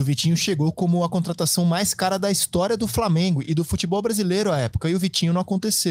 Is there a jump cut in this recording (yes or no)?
no